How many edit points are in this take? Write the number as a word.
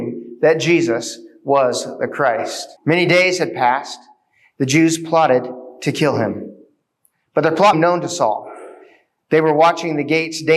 two